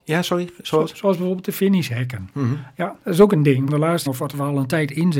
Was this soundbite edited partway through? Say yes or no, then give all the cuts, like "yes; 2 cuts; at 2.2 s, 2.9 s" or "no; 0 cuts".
yes; 3 cuts; at 3.0 s, 3.7 s, 4.1 s